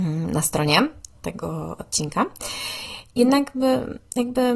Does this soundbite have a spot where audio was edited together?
yes; 1 cut; at 1.8 s

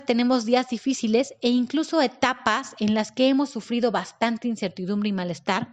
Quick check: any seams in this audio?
no; 0 cuts

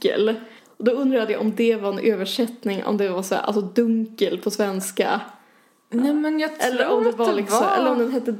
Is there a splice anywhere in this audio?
no; 0 cuts

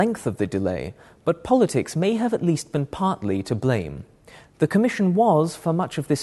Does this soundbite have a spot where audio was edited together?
no; 0 cuts

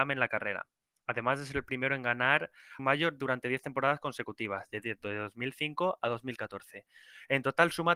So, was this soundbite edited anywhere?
yes; 1 cut; at 2.8 s

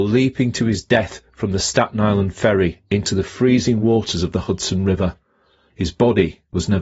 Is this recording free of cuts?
yes; 0 cuts

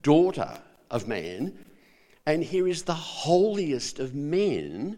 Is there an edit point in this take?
no; 0 cuts

